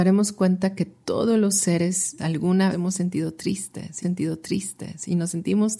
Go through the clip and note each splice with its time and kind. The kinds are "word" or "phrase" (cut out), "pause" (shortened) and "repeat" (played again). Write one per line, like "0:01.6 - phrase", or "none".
0:02.2 - word
0:02.7 - phrase
0:04.0 - repeat